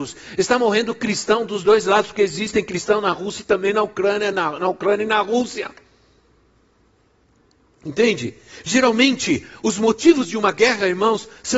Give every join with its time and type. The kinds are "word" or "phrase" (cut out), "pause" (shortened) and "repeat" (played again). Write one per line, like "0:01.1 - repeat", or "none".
none